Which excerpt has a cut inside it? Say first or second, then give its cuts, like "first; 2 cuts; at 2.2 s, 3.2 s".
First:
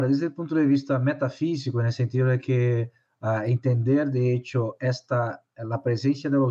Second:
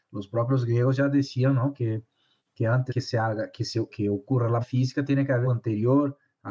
second; 4 cuts; at 2.9 s, 3.9 s, 4.6 s, 5.4 s